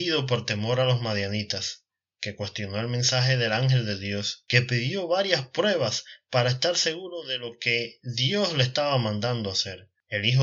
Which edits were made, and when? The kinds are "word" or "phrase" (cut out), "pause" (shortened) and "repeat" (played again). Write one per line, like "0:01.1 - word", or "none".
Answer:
none